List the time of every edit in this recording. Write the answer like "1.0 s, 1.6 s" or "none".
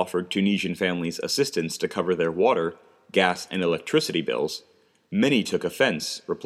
none